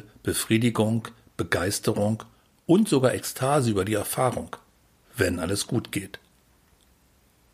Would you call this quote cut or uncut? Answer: uncut